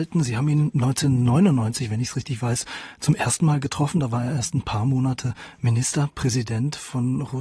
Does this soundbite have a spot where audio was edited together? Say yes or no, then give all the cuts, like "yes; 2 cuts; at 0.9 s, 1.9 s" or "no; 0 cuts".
no; 0 cuts